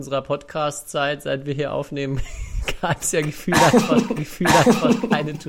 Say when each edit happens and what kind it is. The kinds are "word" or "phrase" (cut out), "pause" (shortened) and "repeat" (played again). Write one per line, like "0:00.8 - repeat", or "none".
0:03.0 - word
0:04.2 - repeat